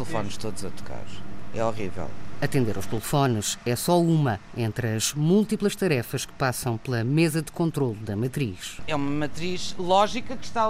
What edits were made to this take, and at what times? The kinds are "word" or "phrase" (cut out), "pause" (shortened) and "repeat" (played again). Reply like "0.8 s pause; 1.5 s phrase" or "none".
none